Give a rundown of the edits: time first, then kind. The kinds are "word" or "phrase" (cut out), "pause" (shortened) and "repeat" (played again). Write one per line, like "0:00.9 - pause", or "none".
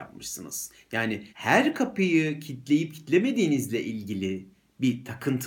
0:01.3 - pause